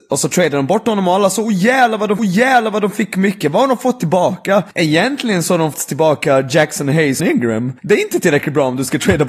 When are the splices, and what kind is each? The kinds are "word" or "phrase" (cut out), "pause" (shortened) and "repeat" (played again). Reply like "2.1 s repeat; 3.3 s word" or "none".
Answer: 2.2 s repeat; 4.7 s pause; 5.7 s word; 7.2 s phrase; 7.8 s pause